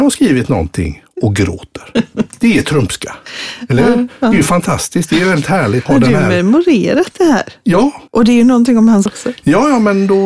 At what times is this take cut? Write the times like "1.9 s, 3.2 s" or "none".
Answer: 5.9 s, 8.1 s, 9.1 s